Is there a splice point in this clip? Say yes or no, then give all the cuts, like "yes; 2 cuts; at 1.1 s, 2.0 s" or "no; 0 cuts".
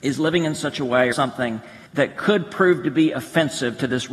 yes; 2 cuts; at 1.1 s, 1.9 s